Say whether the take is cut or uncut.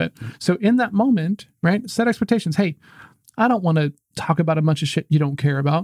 uncut